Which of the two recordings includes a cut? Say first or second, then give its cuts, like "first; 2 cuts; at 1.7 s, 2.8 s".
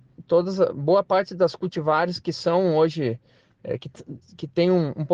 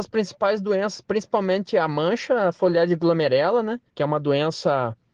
second; 1 cut; at 3.9 s